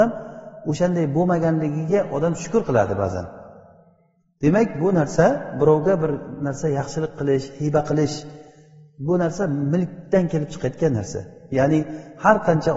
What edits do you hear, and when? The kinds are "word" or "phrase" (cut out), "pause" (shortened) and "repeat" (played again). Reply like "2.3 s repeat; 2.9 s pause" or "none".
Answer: none

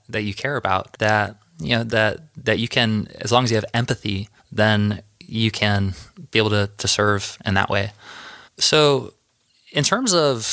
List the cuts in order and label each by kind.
4.4 s pause; 8.4 s pause

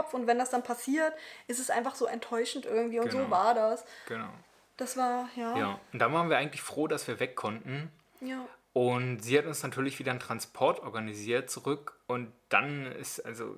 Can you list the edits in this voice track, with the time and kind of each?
none

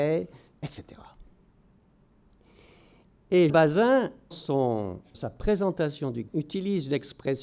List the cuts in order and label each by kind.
3.5 s word; 4.3 s word; 5.1 s word; 6.3 s word

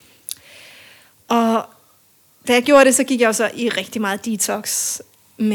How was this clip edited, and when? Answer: none

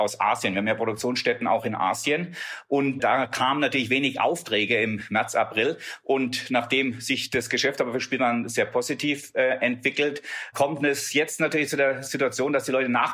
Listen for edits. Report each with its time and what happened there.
3.0 s word

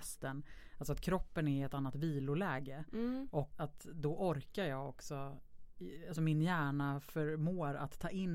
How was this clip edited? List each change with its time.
3.5 s word

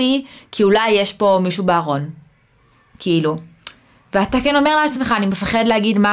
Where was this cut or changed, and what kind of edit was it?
none

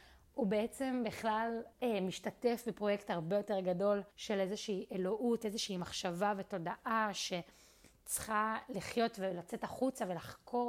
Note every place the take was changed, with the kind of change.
1.7 s pause; 4.1 s pause

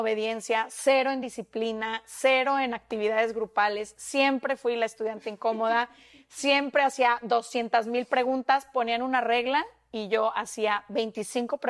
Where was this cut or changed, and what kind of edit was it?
none

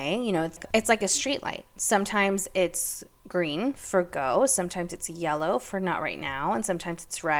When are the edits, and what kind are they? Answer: none

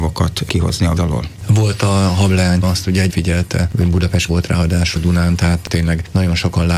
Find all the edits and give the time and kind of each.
1.0 s word; 2.6 s word; 3.1 s word; 4.3 s word; 5.0 s word

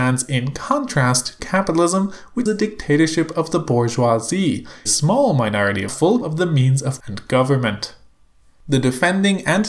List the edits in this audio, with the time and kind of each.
1.4 s word; 2.5 s word; 4.9 s phrase; 5.9 s phrase; 6.2 s word; 7.0 s word

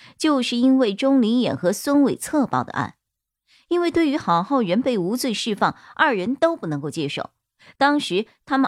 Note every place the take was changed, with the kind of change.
none

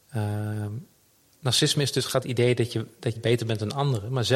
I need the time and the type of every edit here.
2.2 s phrase; 3.2 s word

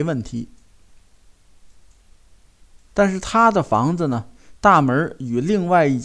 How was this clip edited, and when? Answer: 2.8 s pause

